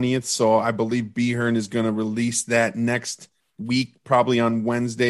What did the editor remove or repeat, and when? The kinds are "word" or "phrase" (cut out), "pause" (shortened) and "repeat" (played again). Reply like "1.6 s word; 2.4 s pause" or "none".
none